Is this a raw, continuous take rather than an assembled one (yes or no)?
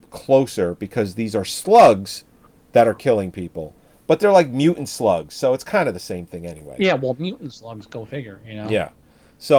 yes